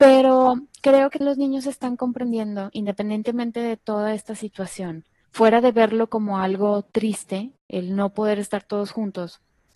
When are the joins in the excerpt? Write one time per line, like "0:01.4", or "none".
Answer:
0:01.2
0:05.2